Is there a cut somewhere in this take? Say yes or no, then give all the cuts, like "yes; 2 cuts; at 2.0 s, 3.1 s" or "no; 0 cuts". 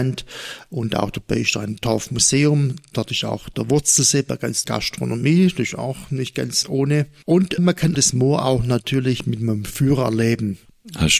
yes; 4 cuts; at 4.6 s, 6.6 s, 7.6 s, 7.9 s